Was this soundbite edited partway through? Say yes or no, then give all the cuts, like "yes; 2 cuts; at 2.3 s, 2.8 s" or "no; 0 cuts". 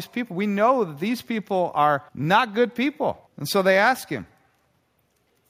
yes; 2 cuts; at 2.1 s, 3.3 s